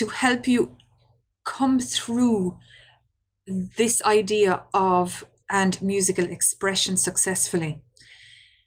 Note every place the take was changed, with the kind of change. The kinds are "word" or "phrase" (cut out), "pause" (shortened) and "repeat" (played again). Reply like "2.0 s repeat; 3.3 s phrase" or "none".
5.4 s word

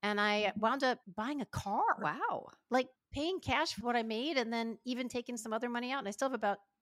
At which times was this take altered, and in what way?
1.0 s pause; 3.0 s pause; 3.8 s phrase

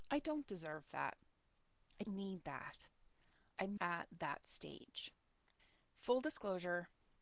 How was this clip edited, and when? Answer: 2.0 s word; 3.8 s word

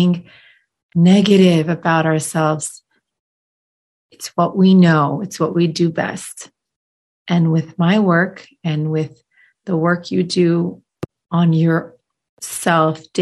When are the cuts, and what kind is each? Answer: none

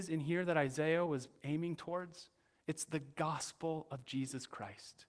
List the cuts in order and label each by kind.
none

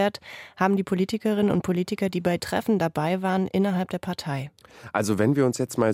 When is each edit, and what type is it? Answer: 2.4 s word

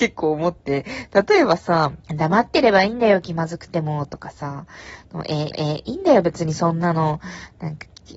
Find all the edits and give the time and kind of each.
2.0 s pause; 5.5 s repeat

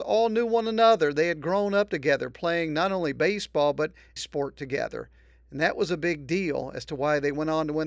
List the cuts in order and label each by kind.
4.2 s word

